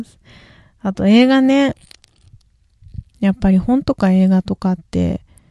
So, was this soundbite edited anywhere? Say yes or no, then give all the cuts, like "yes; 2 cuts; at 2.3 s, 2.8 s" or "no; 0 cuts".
yes; 1 cut; at 3.1 s